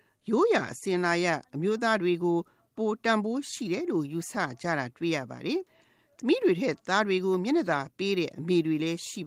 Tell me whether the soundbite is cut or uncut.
cut